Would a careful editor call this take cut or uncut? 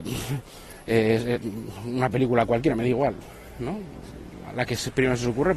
uncut